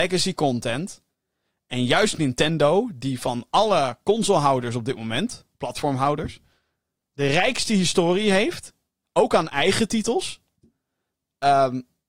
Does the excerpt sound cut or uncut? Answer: uncut